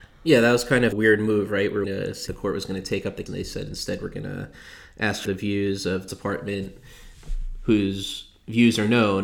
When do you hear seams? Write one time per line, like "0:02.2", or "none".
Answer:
0:00.9
0:01.8
0:02.3
0:03.3
0:05.2
0:06.1